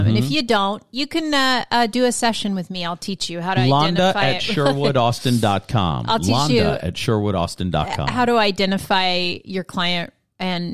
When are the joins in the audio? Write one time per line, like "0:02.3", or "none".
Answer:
none